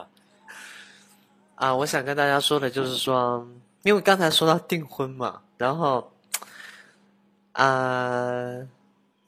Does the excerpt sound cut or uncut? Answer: uncut